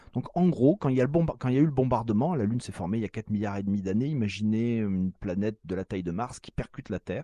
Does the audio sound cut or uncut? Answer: uncut